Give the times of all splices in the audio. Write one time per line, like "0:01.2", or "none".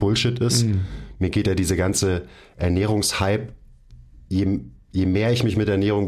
0:04.3